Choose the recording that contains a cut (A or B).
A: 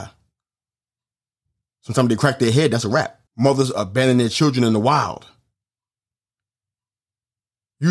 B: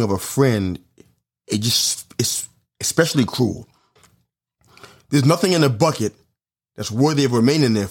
A